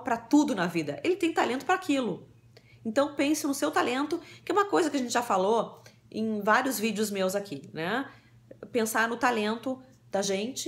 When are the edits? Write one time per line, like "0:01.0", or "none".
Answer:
none